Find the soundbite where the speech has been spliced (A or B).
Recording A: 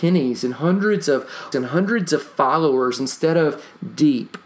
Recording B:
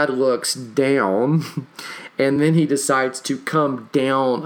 A